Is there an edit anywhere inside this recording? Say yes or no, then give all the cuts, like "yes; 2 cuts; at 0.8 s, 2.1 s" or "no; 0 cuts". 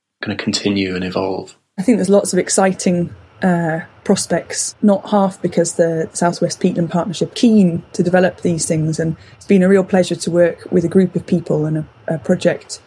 yes; 1 cut; at 7.3 s